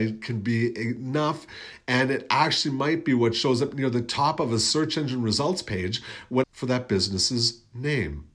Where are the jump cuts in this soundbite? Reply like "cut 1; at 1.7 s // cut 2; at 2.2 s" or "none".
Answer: cut 1; at 6.4 s